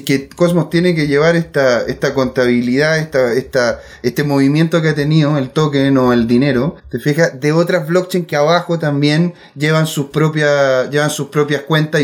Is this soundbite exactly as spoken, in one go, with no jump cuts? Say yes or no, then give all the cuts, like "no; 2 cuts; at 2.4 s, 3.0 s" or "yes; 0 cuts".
no; 1 cut; at 6.8 s